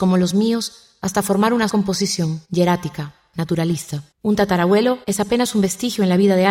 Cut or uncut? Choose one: cut